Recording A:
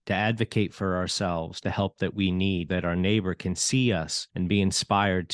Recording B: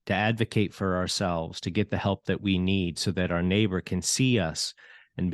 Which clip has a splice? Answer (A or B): A